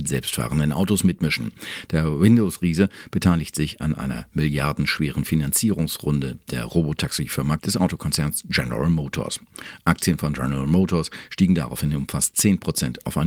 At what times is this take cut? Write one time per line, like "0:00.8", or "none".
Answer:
0:07.6